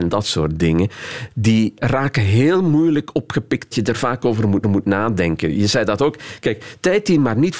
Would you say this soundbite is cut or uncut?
cut